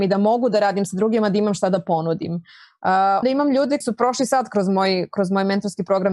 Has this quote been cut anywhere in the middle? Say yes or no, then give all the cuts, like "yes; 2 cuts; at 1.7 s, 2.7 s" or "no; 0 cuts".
yes; 2 cuts; at 3.2 s, 3.8 s